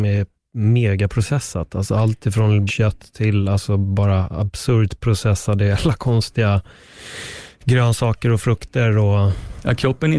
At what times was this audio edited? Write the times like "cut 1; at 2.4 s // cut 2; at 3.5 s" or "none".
cut 1; at 2.7 s

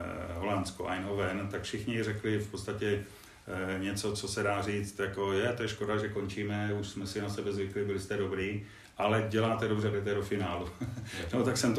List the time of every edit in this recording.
cut 1; at 9.9 s

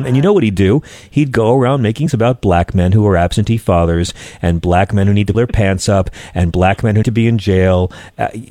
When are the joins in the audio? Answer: cut 1; at 2.1 s // cut 2; at 5.3 s // cut 3; at 7.0 s

